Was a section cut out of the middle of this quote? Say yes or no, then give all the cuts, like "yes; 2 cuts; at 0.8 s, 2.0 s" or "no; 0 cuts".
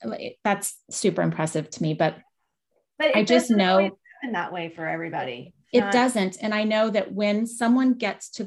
no; 0 cuts